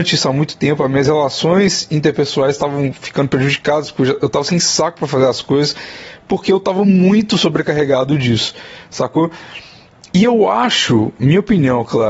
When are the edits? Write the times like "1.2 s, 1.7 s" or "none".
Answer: none